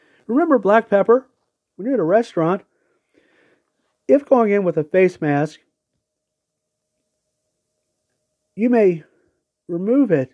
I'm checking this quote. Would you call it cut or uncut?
uncut